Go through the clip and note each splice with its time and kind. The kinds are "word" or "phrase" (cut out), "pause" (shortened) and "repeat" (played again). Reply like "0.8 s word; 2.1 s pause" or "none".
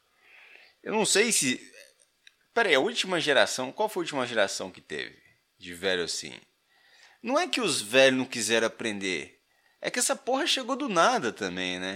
none